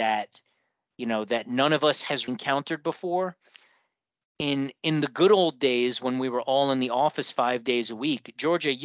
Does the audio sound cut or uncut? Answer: cut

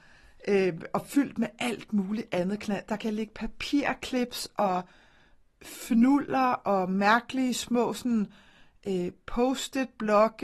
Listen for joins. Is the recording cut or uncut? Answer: uncut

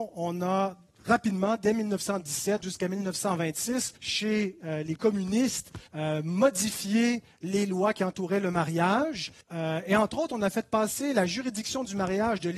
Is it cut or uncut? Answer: cut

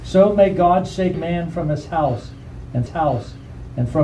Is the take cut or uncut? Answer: cut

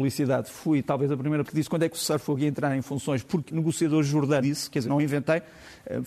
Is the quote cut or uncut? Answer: cut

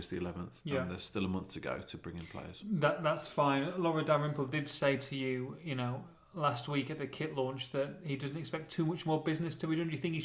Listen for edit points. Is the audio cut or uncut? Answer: uncut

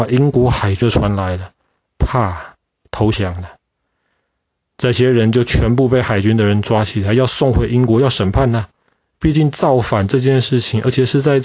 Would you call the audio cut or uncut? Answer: uncut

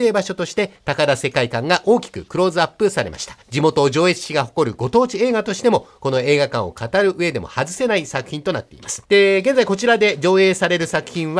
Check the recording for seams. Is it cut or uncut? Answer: cut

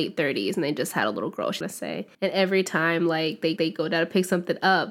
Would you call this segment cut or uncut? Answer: cut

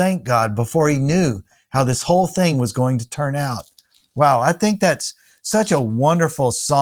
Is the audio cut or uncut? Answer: uncut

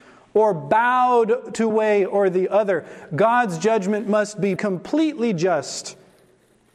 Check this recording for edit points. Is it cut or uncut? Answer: cut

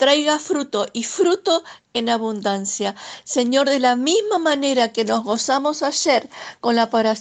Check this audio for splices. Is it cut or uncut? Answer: uncut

